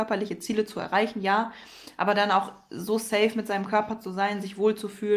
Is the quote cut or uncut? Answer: uncut